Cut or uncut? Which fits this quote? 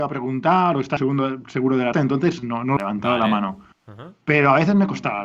cut